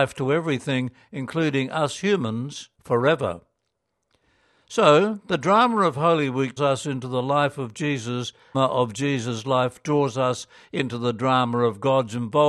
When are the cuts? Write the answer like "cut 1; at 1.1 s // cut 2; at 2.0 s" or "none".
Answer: cut 1; at 2.7 s // cut 2; at 6.6 s // cut 3; at 8.5 s